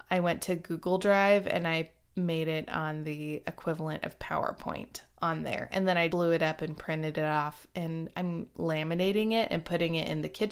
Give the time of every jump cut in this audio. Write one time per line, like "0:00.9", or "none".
0:06.1